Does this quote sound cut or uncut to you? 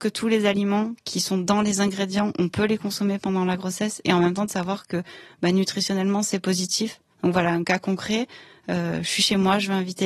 uncut